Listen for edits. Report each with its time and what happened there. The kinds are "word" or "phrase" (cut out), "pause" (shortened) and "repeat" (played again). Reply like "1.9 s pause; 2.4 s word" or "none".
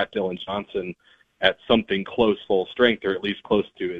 2.4 s word